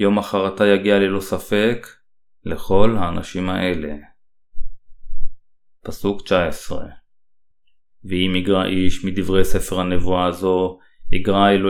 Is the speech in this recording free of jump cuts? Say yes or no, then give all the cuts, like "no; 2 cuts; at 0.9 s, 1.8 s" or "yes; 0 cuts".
yes; 0 cuts